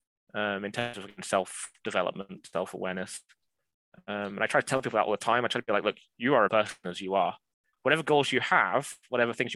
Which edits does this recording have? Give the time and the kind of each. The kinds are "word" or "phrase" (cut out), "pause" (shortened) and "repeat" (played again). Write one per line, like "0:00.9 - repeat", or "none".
0:06.5 - phrase